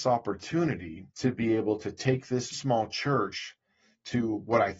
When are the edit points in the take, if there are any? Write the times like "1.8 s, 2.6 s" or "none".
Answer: 1.1 s, 2.5 s